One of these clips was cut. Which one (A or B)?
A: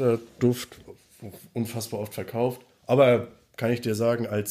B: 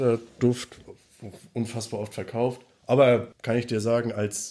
B